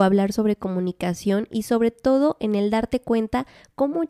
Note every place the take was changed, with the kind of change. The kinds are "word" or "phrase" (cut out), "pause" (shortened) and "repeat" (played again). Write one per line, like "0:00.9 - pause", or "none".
none